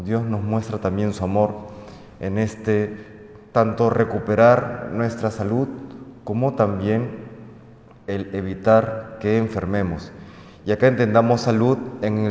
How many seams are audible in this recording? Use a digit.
0